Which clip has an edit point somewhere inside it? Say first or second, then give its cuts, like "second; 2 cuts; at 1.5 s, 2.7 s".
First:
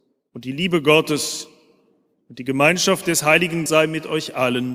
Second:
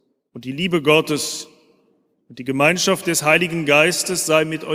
first; 1 cut; at 3.7 s